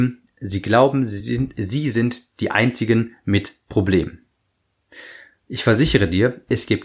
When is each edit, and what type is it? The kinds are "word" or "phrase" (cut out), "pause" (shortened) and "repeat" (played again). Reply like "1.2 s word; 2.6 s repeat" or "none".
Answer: none